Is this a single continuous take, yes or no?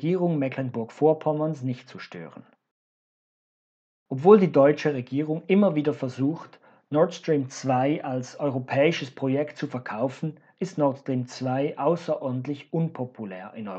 yes